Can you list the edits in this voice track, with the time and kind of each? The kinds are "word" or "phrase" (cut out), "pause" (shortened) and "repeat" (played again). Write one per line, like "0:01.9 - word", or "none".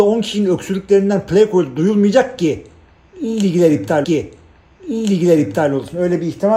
0:04.0 - repeat